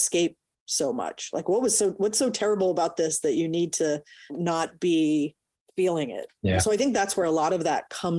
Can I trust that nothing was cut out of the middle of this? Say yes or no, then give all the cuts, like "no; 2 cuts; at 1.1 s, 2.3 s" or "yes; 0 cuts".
yes; 0 cuts